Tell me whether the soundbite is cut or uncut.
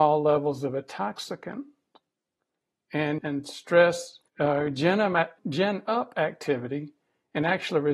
cut